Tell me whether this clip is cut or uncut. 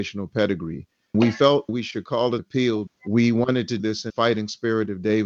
cut